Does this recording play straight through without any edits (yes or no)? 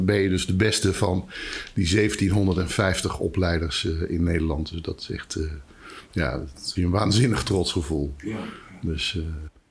no